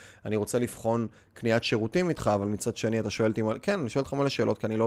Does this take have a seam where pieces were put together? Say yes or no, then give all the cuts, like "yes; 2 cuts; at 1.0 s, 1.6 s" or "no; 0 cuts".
no; 0 cuts